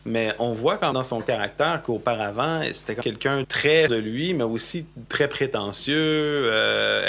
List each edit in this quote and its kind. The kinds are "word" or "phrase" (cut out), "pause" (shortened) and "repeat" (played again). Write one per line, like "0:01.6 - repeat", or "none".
0:00.9 - word
0:03.0 - word
0:03.4 - word
0:03.9 - word
0:05.1 - word